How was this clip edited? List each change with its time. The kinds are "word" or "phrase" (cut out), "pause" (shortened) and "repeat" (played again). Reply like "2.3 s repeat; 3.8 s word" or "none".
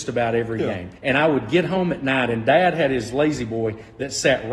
1.0 s pause